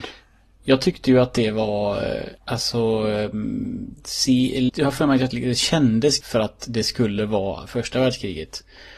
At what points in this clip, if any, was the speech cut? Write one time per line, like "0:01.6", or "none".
0:02.4
0:04.7
0:05.3
0:06.2